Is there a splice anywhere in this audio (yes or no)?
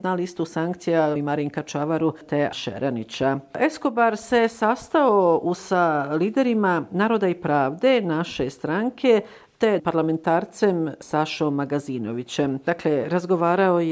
yes